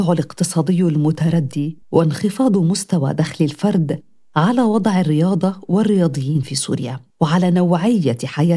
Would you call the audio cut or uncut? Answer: cut